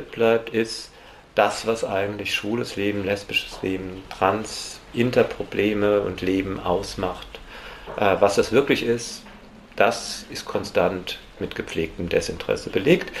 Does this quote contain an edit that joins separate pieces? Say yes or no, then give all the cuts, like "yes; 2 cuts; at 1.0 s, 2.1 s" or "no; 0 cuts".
no; 0 cuts